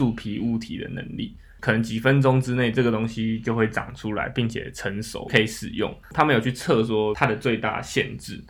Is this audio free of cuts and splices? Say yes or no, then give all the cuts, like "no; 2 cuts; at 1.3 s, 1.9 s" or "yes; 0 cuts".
no; 1 cut; at 6.0 s